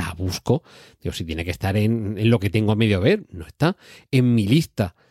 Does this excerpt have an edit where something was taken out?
no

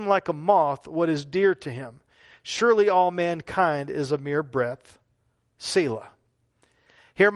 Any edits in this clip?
no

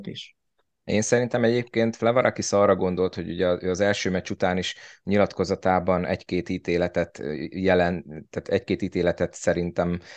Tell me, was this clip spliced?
no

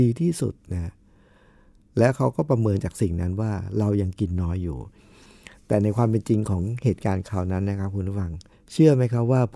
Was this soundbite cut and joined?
yes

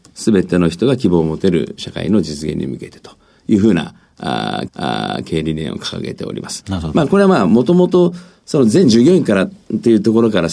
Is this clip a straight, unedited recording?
no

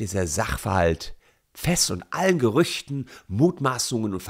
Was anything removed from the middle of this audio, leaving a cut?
no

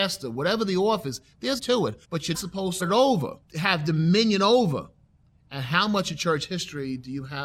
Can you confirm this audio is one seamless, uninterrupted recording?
no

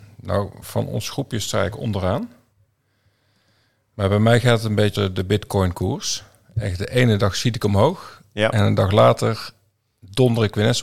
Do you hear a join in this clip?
yes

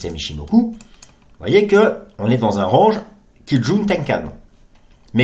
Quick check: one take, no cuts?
yes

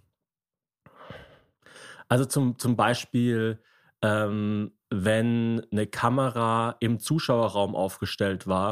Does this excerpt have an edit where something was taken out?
no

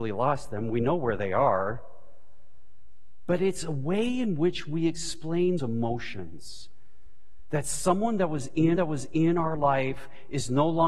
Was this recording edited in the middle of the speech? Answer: yes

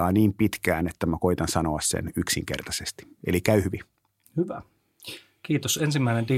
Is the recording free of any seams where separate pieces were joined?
yes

